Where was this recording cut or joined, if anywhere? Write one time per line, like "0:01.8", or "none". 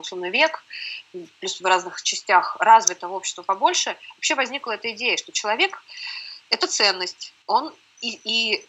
0:07.4

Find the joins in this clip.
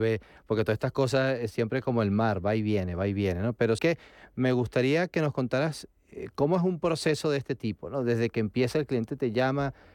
0:03.8

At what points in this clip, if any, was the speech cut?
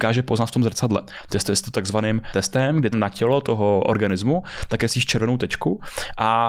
0:02.3
0:02.9

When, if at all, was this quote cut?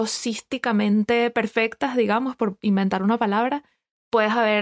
none

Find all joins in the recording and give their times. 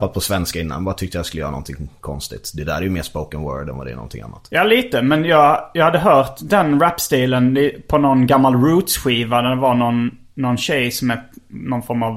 none

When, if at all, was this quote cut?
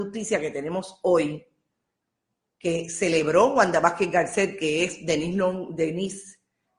none

